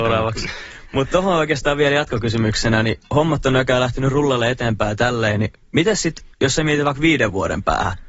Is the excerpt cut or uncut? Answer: cut